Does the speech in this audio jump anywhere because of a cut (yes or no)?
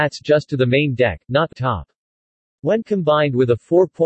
yes